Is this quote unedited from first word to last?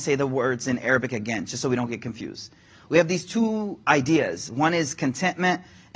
yes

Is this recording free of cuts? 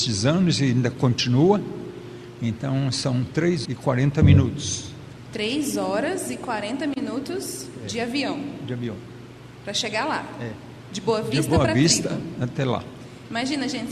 no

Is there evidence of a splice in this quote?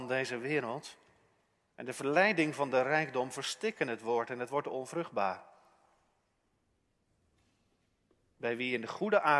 no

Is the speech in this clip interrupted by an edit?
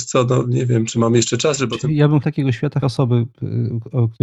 yes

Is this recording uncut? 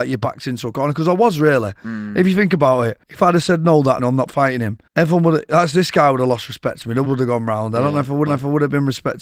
no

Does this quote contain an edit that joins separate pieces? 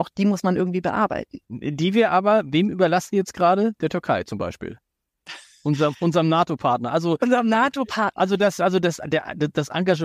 yes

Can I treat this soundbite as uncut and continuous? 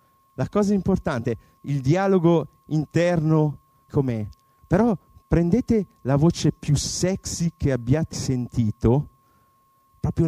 no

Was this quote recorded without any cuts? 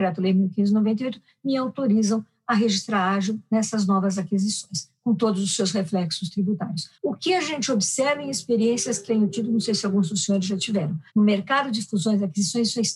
no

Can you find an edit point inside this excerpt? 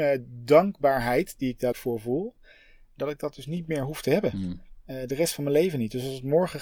yes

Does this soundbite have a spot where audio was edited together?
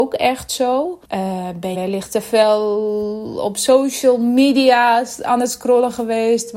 yes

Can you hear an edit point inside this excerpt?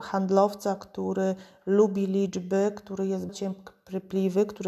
yes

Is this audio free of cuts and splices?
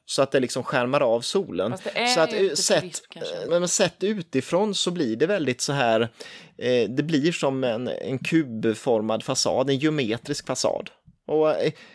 no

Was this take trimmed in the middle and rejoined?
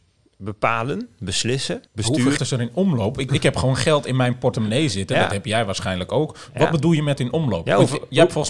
yes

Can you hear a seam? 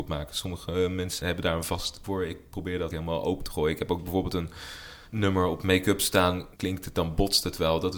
yes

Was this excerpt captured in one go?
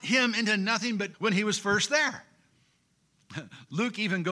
no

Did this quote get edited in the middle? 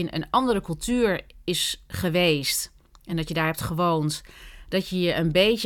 no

